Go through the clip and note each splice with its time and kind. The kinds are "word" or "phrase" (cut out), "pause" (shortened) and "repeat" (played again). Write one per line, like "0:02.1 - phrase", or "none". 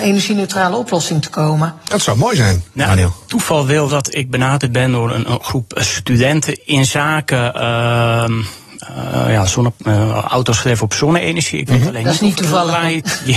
0:03.9 - word

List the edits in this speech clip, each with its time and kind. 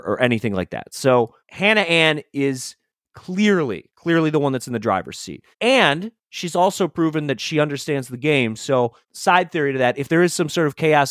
0:01.4 - pause
0:05.5 - pause
0:09.0 - pause

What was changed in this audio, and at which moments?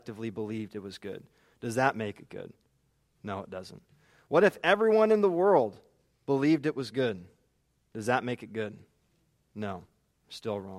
none

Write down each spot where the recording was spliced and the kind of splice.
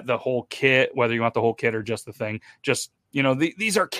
none

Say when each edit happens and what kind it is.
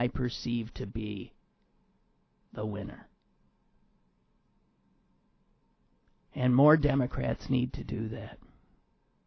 none

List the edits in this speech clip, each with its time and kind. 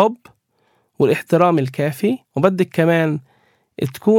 0:02.3 - pause

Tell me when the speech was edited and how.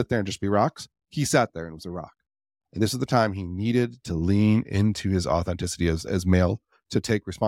none

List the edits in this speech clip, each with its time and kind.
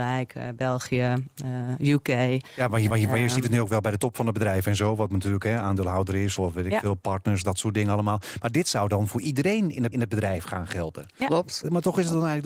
0:02.9 - repeat
0:06.4 - word
0:09.9 - repeat

